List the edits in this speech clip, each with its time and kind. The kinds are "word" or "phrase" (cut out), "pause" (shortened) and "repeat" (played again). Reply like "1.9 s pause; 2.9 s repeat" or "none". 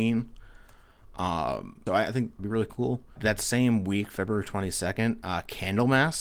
1.9 s word; 2.4 s word; 3.2 s word